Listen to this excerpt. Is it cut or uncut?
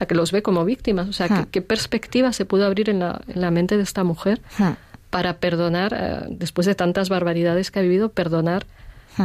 uncut